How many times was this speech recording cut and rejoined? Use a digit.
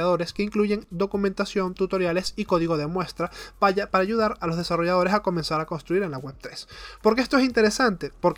0